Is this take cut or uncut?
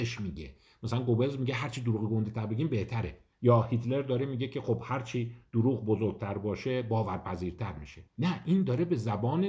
cut